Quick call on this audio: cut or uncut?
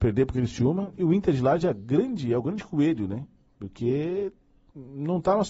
uncut